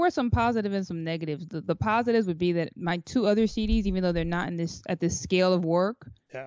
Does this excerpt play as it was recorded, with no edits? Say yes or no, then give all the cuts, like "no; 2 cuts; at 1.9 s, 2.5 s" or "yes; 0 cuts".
yes; 0 cuts